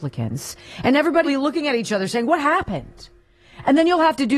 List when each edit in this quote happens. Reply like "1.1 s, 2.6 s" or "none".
1.3 s